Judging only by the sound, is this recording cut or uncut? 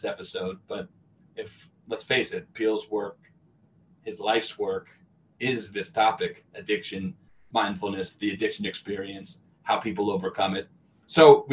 uncut